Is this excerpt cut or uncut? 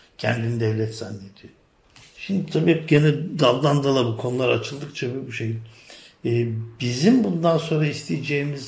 uncut